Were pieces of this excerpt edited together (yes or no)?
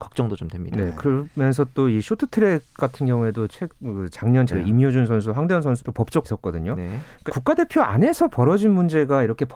yes